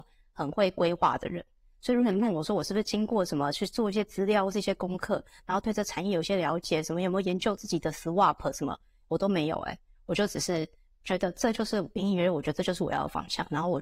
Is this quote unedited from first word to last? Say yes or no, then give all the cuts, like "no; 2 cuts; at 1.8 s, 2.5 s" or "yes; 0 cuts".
yes; 0 cuts